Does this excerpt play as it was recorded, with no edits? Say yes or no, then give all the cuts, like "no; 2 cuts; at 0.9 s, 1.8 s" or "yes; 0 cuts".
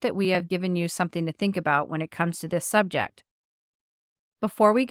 yes; 0 cuts